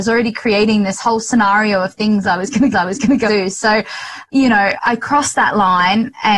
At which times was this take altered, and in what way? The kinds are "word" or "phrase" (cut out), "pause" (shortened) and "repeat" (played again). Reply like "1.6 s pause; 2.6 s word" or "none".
2.7 s repeat; 3.3 s word; 4.8 s word